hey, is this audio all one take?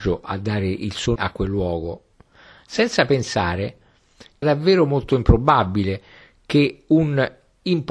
no; 2 cuts; at 1.2 s, 4.4 s

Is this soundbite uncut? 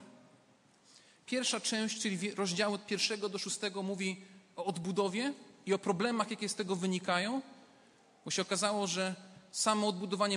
yes; 0 cuts

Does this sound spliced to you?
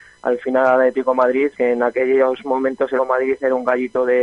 yes; 2 cuts; at 1.5 s, 3.0 s

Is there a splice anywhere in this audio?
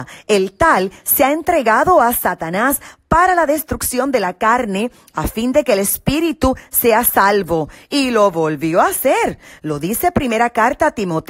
no; 0 cuts

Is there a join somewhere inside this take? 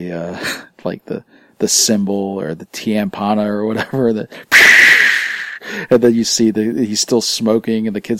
no; 0 cuts

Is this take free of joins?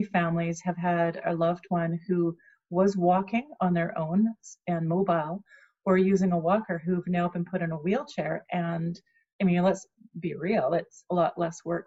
yes; 0 cuts

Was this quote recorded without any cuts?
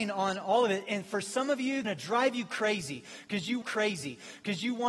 no; 2 cuts; at 1.8 s, 3.6 s

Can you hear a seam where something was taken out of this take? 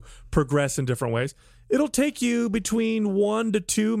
no; 0 cuts

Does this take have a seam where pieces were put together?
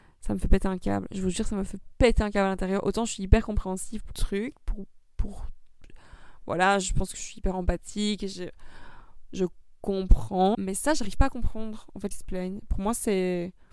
yes; 3 cuts; at 4.1 s, 10.5 s, 12.1 s

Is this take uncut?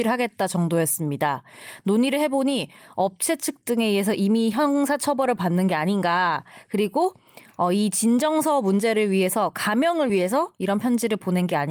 yes; 0 cuts

